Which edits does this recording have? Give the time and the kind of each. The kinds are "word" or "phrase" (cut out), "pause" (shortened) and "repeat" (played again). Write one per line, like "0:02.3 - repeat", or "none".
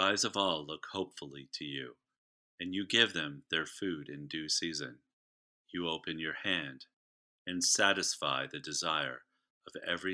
none